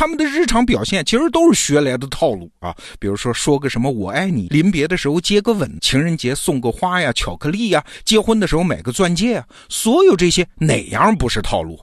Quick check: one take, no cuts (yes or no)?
no